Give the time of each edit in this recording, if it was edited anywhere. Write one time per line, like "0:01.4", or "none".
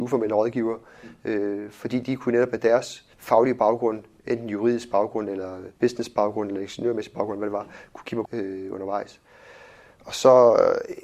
0:03.1
0:05.8
0:08.3